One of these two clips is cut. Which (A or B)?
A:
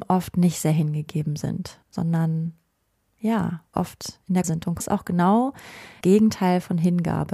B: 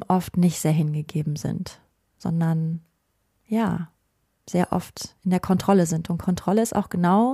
A